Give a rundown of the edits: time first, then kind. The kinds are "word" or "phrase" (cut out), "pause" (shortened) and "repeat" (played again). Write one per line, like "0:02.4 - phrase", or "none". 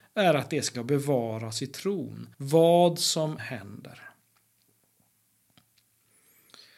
0:02.3 - pause
0:03.4 - word

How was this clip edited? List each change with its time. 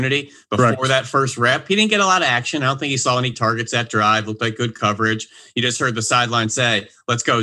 none

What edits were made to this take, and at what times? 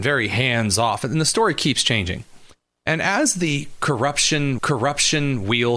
0:04.6 - repeat

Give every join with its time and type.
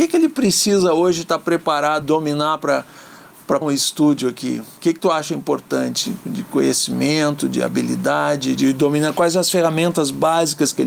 0:02.0 - word
0:03.6 - word
0:04.8 - pause
0:08.6 - word

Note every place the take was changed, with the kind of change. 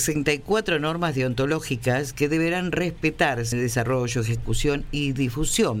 0:03.5 - word

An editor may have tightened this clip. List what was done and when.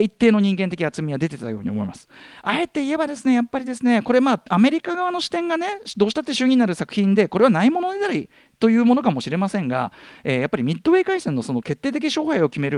none

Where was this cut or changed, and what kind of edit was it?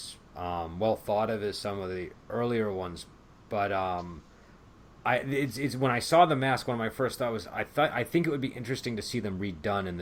none

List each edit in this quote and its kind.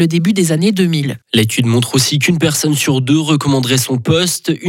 0:01.2 - pause

